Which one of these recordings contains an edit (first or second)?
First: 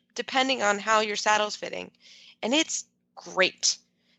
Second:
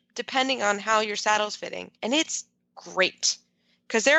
second